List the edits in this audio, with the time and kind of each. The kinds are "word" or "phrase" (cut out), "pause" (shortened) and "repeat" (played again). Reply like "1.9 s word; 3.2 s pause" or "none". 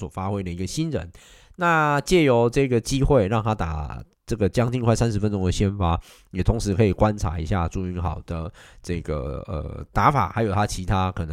none